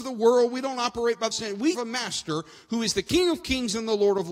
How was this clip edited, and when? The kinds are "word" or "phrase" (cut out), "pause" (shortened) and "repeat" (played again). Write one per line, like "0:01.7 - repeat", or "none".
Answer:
0:01.3 - word
0:01.7 - word